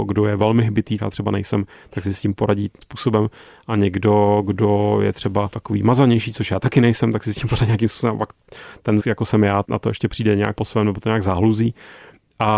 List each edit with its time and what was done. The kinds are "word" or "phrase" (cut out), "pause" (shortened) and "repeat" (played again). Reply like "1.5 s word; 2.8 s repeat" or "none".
1.0 s word; 2.8 s word; 5.5 s word; 9.0 s word; 9.6 s word; 10.6 s word

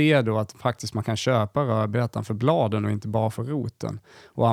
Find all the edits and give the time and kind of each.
none

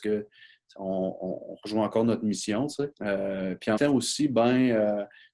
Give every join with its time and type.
2.9 s pause; 3.8 s word

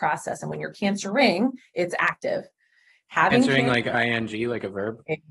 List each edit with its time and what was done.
none

